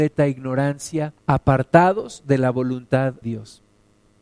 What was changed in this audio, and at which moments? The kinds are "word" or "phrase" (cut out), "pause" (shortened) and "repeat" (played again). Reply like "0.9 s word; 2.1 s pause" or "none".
1.2 s pause; 3.2 s word